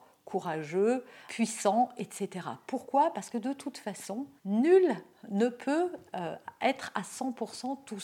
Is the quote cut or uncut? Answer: cut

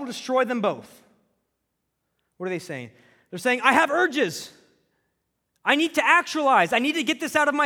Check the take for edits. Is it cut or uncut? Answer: uncut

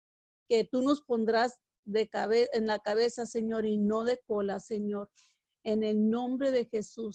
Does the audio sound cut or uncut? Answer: uncut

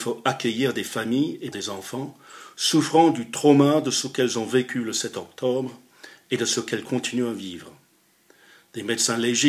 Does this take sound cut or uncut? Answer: cut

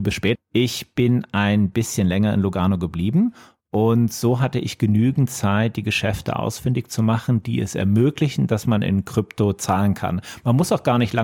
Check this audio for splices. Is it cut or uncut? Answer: uncut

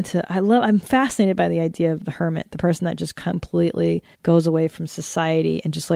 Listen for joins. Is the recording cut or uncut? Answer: cut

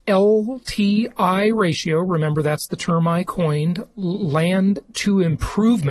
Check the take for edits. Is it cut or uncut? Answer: uncut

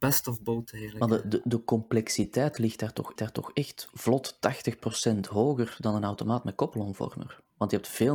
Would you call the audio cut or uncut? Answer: cut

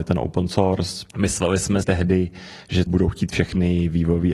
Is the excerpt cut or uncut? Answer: cut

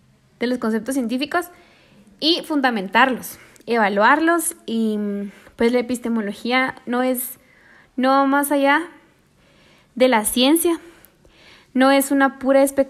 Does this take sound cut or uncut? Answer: uncut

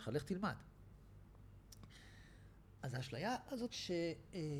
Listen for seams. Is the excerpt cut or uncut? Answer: cut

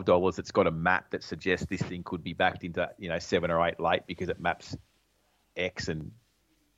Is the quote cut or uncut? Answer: uncut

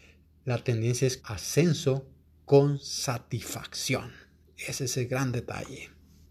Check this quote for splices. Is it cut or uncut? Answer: cut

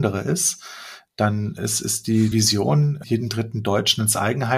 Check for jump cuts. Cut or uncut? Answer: cut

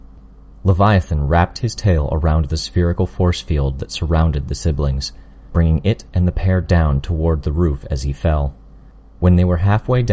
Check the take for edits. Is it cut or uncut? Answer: uncut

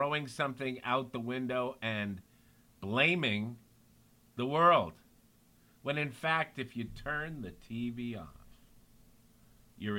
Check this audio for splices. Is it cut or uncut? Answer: uncut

